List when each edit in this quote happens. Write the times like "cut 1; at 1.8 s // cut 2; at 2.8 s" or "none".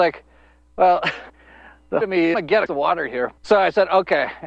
cut 1; at 1.3 s // cut 2; at 2.0 s // cut 3; at 2.3 s // cut 4; at 2.7 s // cut 5; at 3.4 s